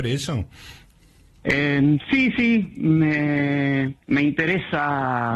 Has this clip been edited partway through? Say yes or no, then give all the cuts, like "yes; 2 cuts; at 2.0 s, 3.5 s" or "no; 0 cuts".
yes; 1 cut; at 4.0 s